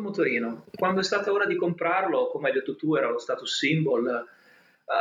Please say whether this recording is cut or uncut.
uncut